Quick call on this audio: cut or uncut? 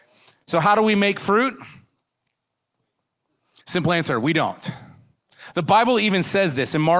cut